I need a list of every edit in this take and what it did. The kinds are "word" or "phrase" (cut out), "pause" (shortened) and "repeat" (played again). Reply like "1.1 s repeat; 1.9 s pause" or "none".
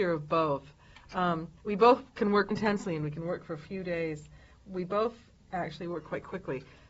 1.6 s pause; 2.5 s word